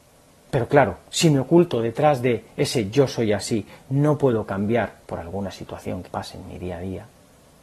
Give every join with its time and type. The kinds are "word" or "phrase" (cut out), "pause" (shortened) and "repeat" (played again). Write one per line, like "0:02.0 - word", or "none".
0:01.1 - pause
0:05.0 - pause
0:06.1 - word